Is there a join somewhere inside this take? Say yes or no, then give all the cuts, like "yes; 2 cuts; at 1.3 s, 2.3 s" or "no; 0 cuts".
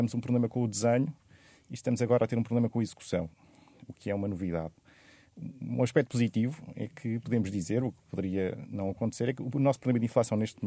no; 0 cuts